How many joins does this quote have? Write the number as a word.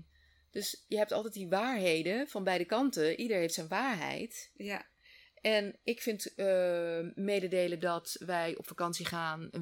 zero